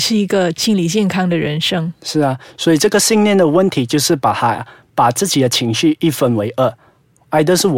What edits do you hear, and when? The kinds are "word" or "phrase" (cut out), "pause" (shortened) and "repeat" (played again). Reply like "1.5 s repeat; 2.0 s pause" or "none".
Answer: none

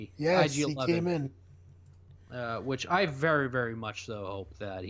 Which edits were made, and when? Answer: none

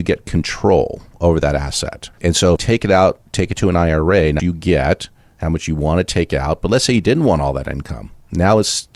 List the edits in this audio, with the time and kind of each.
2.1 s pause; 2.6 s phrase; 4.4 s phrase

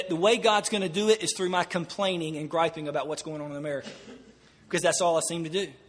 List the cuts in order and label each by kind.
none

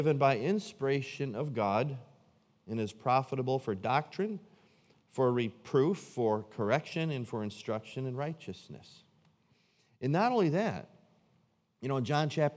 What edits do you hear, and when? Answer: none

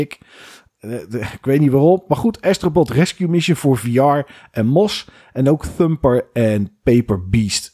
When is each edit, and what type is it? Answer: none

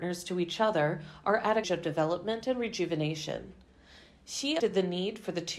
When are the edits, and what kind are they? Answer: 1.6 s phrase; 4.6 s word

